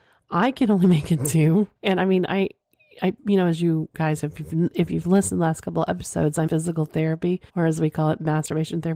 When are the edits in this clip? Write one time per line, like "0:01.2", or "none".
0:01.8
0:03.2
0:06.5
0:07.5